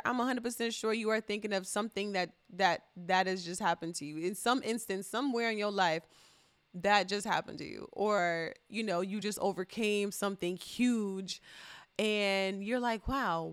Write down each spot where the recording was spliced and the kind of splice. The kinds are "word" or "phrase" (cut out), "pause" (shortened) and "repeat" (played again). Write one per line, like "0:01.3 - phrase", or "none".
none